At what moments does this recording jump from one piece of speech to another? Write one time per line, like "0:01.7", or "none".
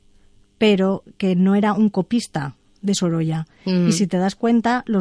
none